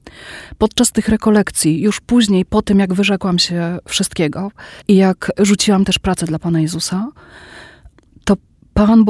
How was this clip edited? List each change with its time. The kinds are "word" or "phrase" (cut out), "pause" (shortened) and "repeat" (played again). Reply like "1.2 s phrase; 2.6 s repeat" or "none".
4.8 s pause